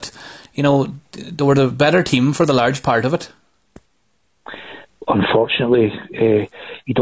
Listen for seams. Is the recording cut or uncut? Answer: uncut